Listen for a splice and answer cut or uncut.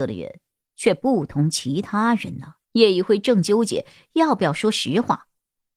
cut